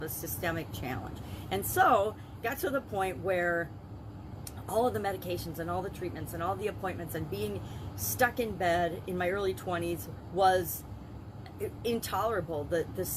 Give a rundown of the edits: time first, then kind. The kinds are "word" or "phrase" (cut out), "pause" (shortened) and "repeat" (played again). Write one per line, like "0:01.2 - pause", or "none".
none